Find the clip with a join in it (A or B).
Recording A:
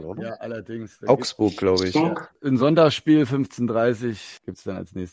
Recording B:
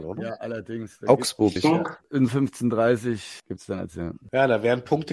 B